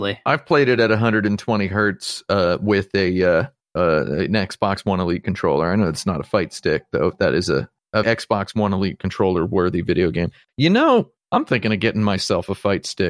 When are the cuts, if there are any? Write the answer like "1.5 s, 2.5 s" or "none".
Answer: 8.0 s